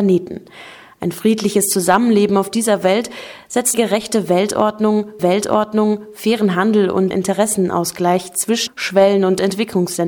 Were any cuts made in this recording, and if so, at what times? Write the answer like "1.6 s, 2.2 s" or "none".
3.7 s, 5.2 s, 7.1 s, 8.7 s

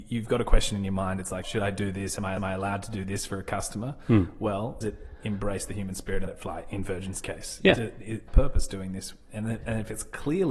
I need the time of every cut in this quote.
1.4 s, 2.4 s, 4.8 s, 6.3 s, 8.3 s

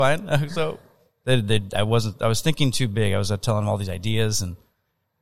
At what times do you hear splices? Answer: none

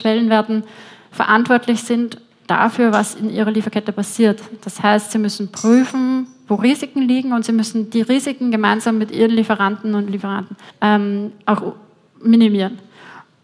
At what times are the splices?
10.7 s

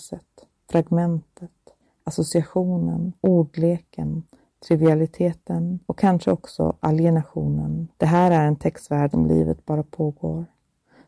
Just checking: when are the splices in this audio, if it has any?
3.2 s, 5.8 s, 7.9 s, 9.1 s

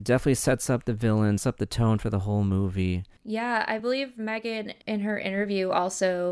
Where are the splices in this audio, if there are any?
1.4 s, 4.8 s

